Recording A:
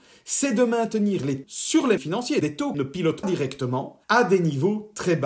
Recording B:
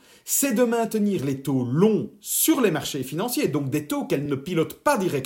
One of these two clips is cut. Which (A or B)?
A